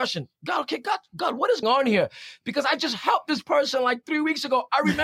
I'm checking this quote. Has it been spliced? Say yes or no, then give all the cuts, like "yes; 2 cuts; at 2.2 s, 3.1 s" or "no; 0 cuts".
yes; 1 cut; at 1.6 s